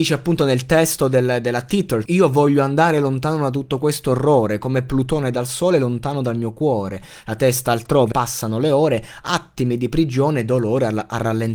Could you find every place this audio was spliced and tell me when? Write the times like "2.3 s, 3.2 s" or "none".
2.1 s, 8.1 s